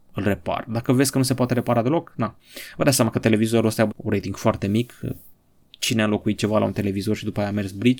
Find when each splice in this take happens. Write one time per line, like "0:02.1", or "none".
0:03.9